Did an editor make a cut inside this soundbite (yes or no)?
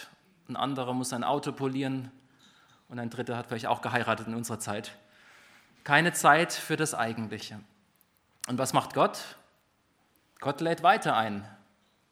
no